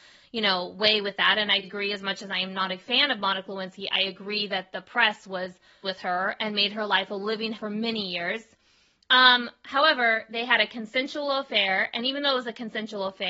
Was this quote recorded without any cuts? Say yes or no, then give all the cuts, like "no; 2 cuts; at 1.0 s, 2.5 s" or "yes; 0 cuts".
no; 3 cuts; at 1.6 s, 5.8 s, 7.5 s